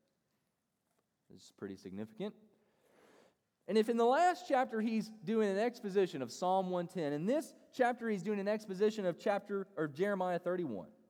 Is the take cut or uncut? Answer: uncut